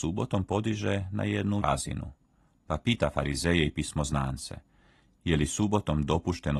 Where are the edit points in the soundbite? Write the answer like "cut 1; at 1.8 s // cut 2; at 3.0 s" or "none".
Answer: cut 1; at 1.6 s